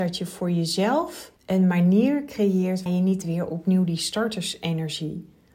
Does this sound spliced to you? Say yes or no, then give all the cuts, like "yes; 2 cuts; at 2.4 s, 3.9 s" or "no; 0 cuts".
yes; 3 cuts; at 1.4 s, 2.9 s, 3.2 s